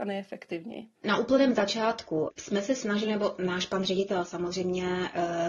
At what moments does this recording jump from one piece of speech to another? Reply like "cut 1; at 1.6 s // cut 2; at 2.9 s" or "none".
cut 1; at 0.9 s